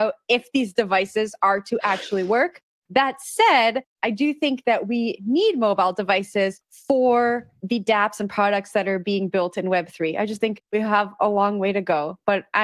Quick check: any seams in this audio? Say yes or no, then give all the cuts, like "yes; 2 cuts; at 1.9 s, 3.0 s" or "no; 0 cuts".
no; 0 cuts